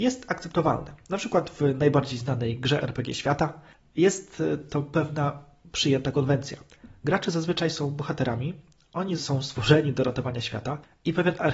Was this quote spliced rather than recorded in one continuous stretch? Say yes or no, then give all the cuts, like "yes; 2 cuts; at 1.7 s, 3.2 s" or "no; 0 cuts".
yes; 1 cut; at 9.2 s